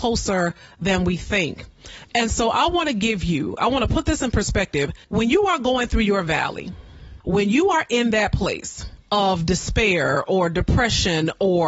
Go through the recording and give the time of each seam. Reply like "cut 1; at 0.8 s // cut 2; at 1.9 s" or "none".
cut 1; at 5.0 s // cut 2; at 7.2 s // cut 3; at 9.0 s